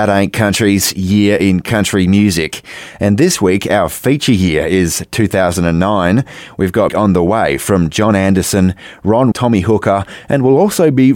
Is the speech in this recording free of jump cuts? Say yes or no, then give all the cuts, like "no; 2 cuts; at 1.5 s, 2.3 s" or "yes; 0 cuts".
no; 2 cuts; at 6.9 s, 9.3 s